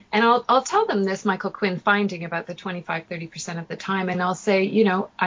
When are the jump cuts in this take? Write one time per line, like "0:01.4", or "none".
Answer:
none